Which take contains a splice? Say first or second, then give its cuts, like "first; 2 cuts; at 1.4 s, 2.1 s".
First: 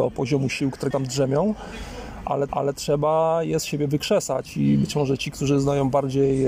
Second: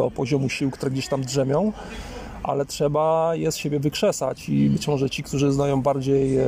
first; 2 cuts; at 0.9 s, 2.5 s